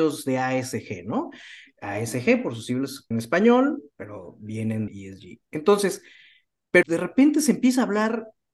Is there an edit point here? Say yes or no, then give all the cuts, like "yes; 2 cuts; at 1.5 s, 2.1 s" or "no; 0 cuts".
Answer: yes; 3 cuts; at 3.1 s, 4.9 s, 6.8 s